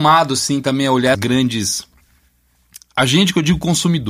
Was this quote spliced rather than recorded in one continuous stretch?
yes; 1 cut; at 1.1 s

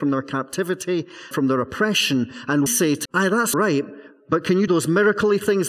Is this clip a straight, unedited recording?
no; 5 cuts; at 1.3 s, 2.7 s, 3.0 s, 3.5 s, 4.7 s

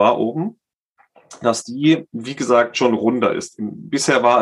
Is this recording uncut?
no; 1 cut; at 2.1 s

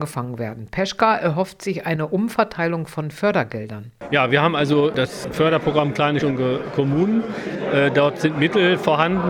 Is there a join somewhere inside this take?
yes; 1 cut; at 6.2 s

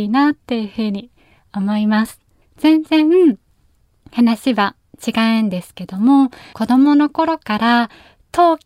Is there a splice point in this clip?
yes; 2 cuts; at 2.4 s, 6.5 s

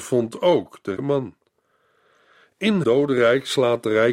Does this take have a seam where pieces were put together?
yes; 2 cuts; at 1.0 s, 2.8 s

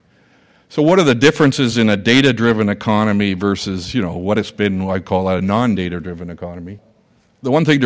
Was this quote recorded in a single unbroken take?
yes; 0 cuts

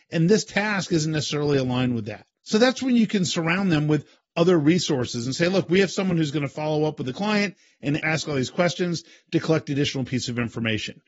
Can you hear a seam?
no; 0 cuts

